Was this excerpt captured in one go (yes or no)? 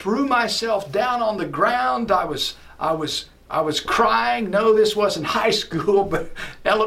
yes